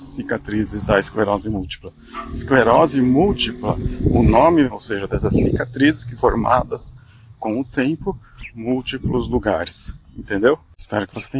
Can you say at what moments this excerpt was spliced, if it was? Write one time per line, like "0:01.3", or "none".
0:04.7
0:06.2
0:08.5

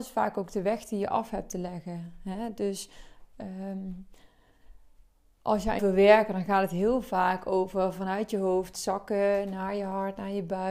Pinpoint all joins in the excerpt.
0:05.8

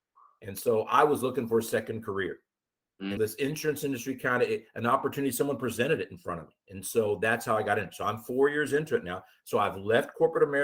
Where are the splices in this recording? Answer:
0:03.2

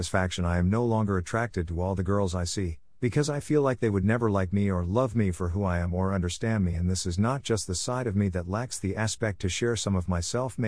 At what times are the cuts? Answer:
none

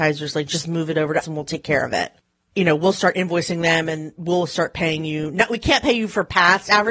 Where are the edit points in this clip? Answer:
0:01.2

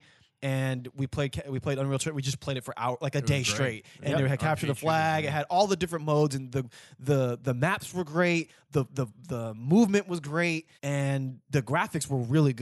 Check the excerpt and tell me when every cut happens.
0:10.8

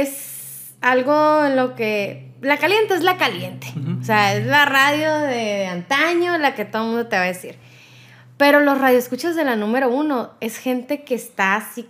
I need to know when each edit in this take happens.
none

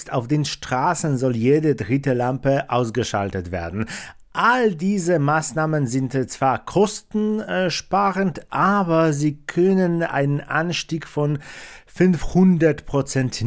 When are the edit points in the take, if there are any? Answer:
none

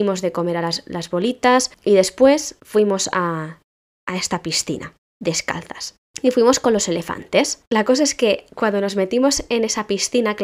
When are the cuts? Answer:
none

